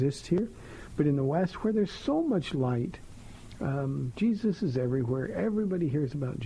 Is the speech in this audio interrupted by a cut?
no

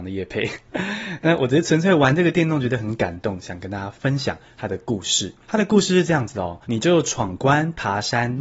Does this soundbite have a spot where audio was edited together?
yes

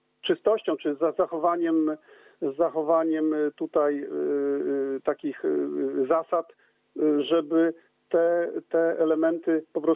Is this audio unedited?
yes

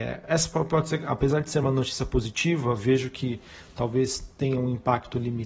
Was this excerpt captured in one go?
yes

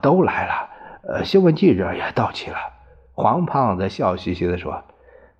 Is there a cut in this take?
no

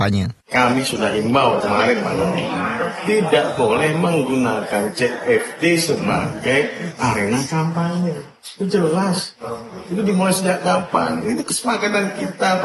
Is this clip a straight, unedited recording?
no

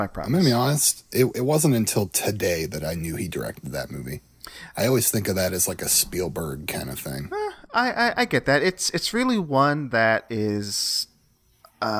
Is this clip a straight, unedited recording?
yes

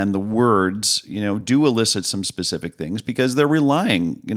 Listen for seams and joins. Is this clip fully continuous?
yes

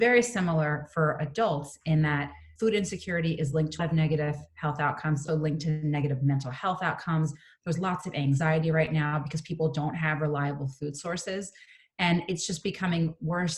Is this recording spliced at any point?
yes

